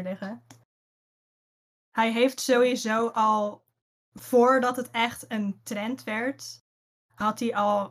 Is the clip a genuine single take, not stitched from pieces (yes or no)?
yes